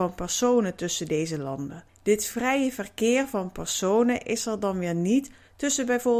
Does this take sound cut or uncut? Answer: cut